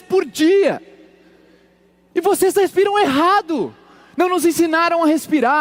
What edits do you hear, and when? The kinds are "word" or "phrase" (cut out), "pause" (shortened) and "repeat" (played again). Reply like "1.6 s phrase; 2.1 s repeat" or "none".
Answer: none